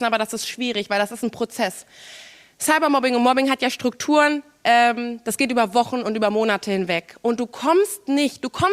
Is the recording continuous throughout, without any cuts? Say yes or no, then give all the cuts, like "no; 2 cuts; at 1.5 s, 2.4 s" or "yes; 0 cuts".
yes; 0 cuts